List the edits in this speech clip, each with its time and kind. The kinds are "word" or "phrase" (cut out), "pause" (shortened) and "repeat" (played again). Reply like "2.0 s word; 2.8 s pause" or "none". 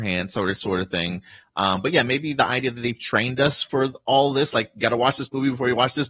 none